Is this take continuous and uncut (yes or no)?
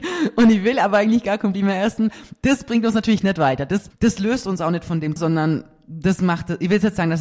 no